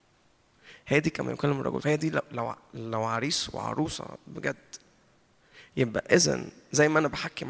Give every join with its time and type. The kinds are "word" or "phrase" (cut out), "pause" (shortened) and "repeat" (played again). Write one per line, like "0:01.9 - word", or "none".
0:01.8 - word